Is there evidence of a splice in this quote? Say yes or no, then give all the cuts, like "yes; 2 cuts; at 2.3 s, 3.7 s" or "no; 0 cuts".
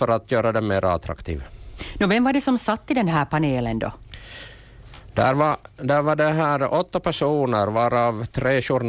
no; 0 cuts